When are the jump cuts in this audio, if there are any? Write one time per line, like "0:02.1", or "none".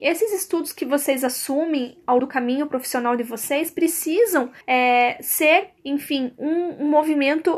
0:02.2
0:04.6
0:05.8